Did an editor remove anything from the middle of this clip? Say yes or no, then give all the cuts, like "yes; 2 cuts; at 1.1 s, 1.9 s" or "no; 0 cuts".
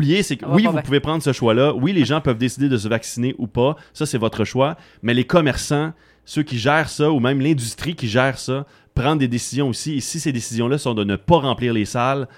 no; 0 cuts